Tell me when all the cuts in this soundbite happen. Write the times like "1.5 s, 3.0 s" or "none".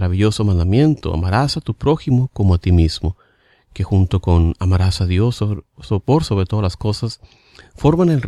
none